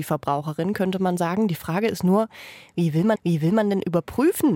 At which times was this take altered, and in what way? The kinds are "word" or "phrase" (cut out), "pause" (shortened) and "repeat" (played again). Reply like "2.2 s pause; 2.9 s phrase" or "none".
3.1 s repeat

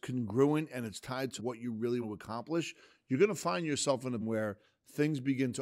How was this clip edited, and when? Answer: 1.4 s word; 2.0 s word; 4.2 s word

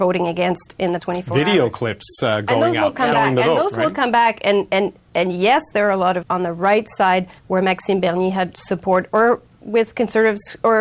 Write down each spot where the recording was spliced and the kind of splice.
1.0 s word; 6.2 s phrase; 7.4 s pause

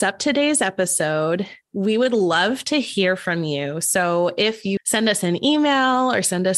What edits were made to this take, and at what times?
4.8 s phrase

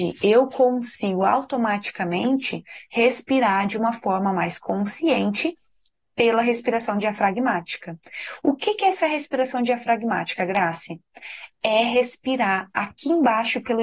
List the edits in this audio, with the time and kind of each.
none

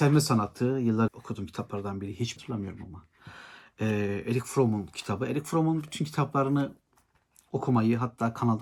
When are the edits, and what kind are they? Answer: 1.1 s word; 2.4 s word

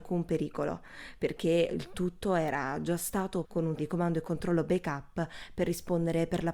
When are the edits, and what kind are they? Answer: 1.7 s word; 3.4 s word; 3.8 s word

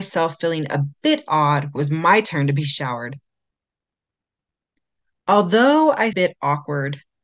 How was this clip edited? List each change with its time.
1.8 s word; 6.1 s phrase

